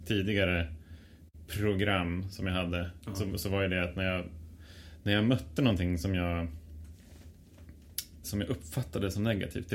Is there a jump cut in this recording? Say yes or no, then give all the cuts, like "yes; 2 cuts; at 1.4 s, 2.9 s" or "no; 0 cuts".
yes; 1 cut; at 8.2 s